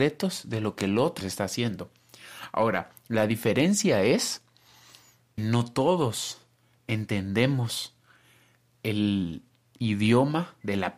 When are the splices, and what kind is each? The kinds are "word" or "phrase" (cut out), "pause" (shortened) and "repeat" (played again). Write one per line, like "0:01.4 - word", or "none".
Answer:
0:01.2 - word
0:05.4 - word